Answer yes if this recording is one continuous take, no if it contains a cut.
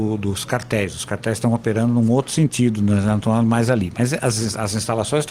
yes